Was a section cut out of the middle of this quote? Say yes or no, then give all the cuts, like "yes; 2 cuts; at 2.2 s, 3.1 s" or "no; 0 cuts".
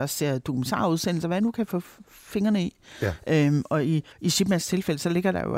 yes; 1 cut; at 4.1 s